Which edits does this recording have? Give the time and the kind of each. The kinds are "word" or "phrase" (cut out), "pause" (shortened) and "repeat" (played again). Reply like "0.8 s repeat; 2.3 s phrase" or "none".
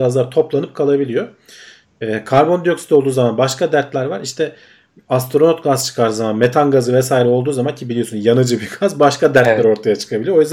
none